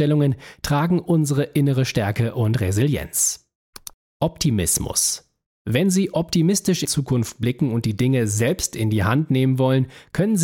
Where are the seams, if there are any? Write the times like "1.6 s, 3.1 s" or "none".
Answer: 6.8 s